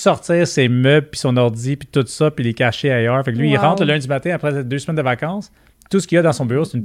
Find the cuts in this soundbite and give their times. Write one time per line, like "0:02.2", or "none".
none